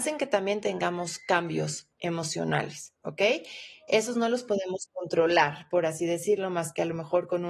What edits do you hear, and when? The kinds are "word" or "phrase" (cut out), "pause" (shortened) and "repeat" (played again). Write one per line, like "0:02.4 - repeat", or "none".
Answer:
none